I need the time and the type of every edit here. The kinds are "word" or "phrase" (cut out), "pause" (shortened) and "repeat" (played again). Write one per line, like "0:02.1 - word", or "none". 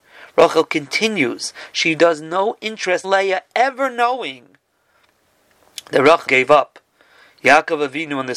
0:03.0 - word
0:06.3 - word

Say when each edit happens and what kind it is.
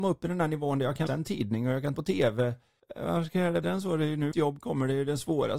0:01.1 - word
0:01.9 - word
0:02.8 - pause
0:03.6 - word
0:04.3 - word

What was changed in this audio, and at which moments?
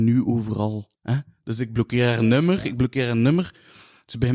0:01.0 - pause

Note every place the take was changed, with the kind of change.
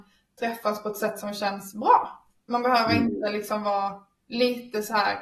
none

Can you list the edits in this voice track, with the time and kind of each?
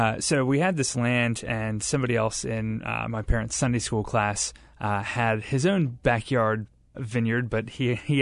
0:06.9 - word

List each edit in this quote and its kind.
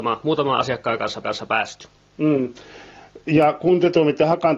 0:01.2 - repeat

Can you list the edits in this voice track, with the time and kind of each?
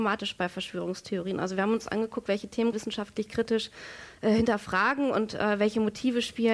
0:02.7 - phrase

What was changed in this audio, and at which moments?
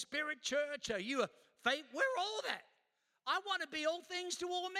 none

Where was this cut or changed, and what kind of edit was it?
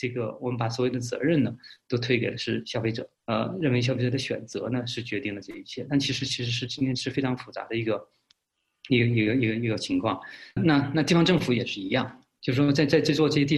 0:03.1 - pause
0:10.6 - word

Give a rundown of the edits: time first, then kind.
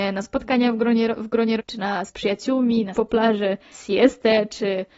0:01.6 - word
0:02.1 - word
0:02.9 - word
0:03.7 - word

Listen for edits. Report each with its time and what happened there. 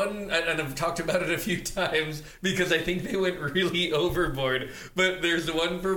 none

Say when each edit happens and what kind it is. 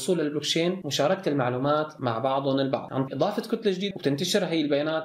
0:03.1 - word
0:03.9 - word

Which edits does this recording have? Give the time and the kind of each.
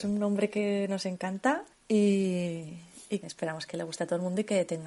0:01.7 - pause
0:03.2 - word

